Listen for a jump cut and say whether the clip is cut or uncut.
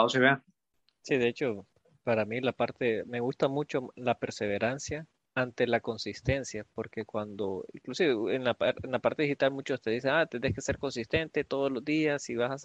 uncut